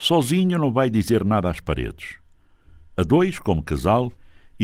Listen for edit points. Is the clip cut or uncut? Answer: uncut